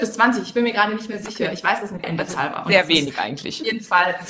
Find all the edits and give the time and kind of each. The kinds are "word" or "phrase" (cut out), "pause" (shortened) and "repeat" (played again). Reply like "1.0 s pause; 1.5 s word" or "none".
2.0 s word